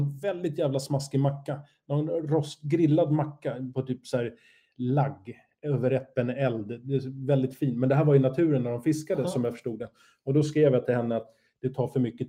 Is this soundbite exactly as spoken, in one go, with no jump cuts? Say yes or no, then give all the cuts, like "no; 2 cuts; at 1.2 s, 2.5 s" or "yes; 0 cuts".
yes; 0 cuts